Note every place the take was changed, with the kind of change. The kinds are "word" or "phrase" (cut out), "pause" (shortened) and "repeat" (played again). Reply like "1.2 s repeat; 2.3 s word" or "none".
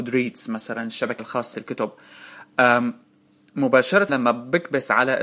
1.2 s word; 1.5 s word; 4.1 s word